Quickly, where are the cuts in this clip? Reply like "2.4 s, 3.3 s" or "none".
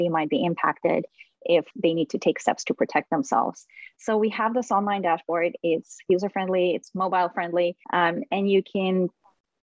1.7 s, 7.8 s